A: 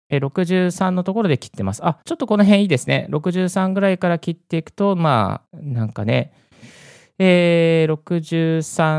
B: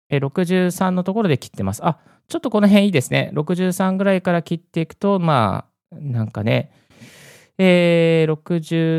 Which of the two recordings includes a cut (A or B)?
A